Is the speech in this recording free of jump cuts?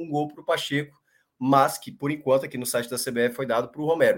yes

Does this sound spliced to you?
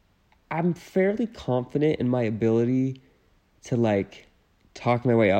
no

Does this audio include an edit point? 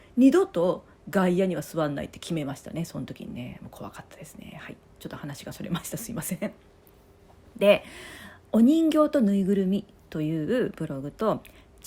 no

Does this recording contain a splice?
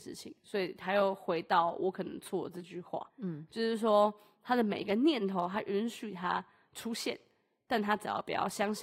yes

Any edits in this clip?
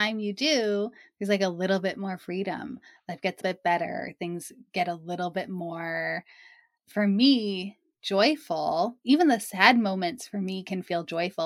yes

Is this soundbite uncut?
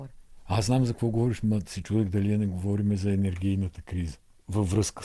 yes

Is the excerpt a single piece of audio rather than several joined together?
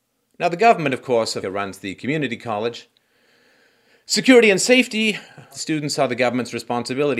no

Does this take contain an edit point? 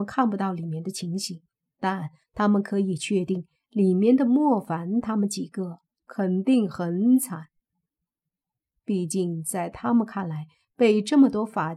no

